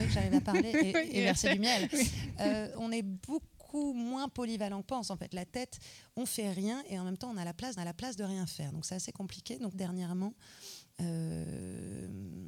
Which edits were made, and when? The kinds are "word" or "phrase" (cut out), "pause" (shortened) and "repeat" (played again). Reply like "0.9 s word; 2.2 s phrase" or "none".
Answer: 4.8 s word; 7.8 s repeat; 9.7 s word